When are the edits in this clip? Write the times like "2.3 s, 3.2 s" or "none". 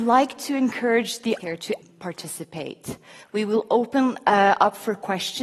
1.4 s, 1.8 s